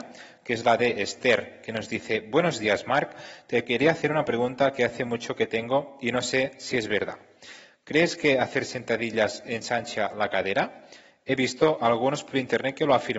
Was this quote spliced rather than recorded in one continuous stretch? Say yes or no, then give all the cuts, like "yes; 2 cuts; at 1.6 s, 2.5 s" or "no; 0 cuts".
no; 0 cuts